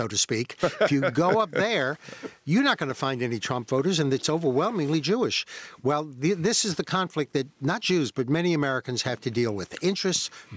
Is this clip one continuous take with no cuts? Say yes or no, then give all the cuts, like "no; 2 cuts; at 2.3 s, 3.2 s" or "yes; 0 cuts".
no; 1 cut; at 7.8 s